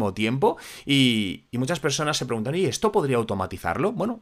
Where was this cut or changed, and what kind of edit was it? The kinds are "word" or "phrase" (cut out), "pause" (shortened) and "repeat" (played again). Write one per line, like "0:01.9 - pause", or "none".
none

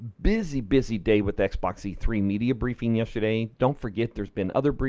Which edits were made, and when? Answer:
none

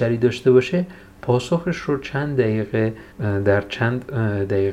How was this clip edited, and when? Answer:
0:03.1 - pause

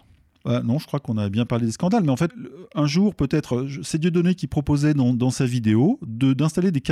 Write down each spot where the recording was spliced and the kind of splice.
0:02.3 - word

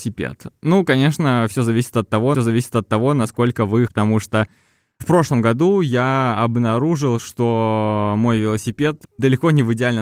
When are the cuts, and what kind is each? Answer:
0:02.3 - repeat
0:03.9 - phrase

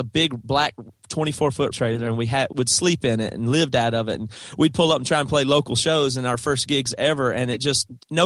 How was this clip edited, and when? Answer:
0:01.7 - word
0:02.5 - word

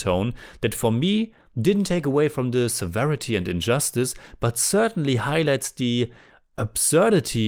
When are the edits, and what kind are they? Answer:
none

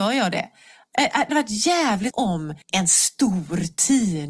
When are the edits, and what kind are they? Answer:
0:01.3 - word
0:02.1 - word
0:02.6 - pause

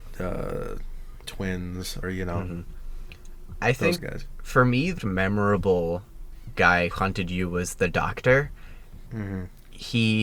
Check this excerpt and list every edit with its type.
0:01.2 - word
0:02.0 - word
0:04.0 - word
0:05.0 - word
0:06.9 - word
0:09.1 - word

